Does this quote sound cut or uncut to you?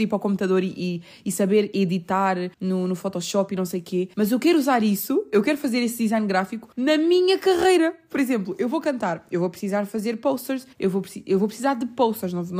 cut